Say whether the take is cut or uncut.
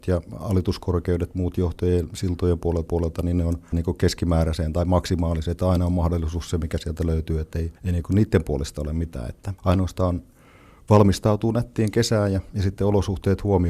cut